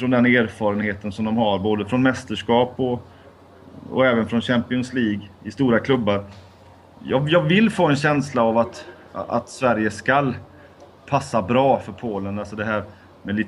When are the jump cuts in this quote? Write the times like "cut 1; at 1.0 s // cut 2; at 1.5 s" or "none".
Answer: none